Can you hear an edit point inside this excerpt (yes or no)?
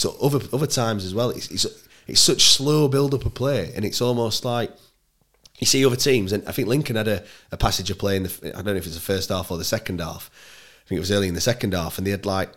no